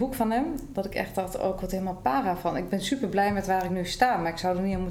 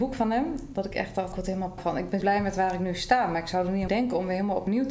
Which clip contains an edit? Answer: second; 4 cuts; at 1.3 s, 1.8 s, 2.2 s, 3.9 s

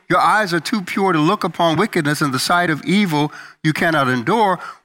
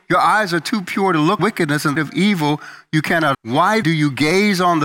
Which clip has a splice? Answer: second; 4 cuts; at 1.4 s, 1.9 s, 3.3 s, 3.8 s

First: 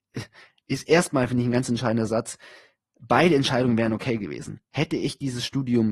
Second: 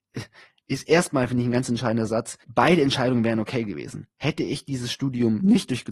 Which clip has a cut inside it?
second; 1 cut; at 2.4 s

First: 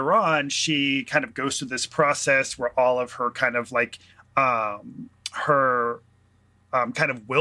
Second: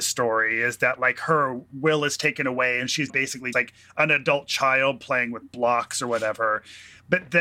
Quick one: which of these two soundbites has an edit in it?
second; 2 cuts; at 3.1 s, 3.5 s

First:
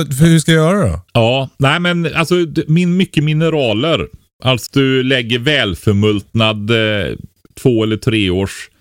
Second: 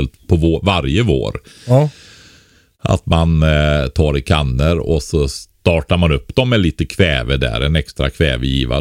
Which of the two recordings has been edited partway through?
first; 3 cuts; at 1.1 s, 4.7 s, 7.5 s

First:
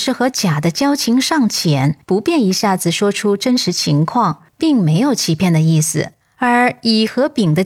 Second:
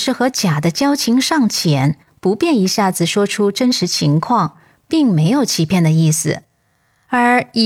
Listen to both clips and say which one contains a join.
first; 3 cuts; at 2.0 s, 4.5 s, 6.2 s

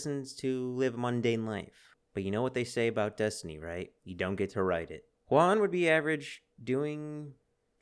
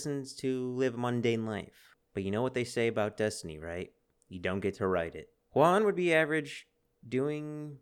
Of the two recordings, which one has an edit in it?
first; 2 cuts; at 4.0 s, 6.5 s

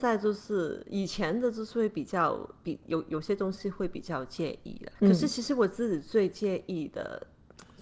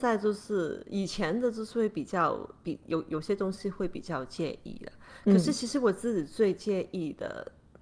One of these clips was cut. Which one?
first; 1 cut; at 5.0 s

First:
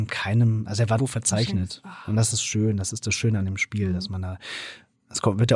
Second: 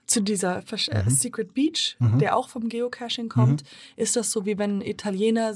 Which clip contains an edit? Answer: first; 1 cut; at 1.0 s

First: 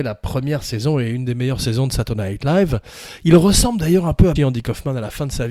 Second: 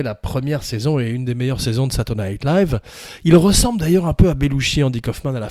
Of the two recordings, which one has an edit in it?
first; 1 cut; at 4.4 s

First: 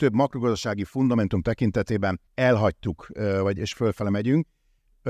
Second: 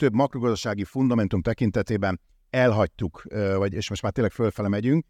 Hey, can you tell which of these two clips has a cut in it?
first; 2 cuts; at 2.3 s, 3.7 s

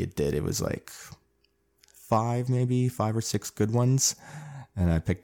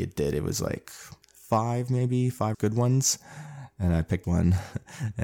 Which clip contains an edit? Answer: second; 3 cuts; at 1.2 s, 2.5 s, 4.2 s

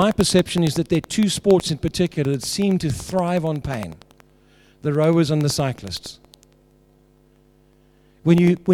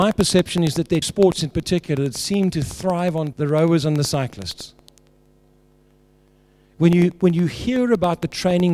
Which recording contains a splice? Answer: second; 2 cuts; at 1.0 s, 3.3 s

